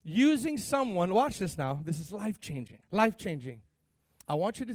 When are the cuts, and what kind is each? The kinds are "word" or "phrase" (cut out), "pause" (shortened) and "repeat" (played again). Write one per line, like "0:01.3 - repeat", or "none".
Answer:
0:02.8 - pause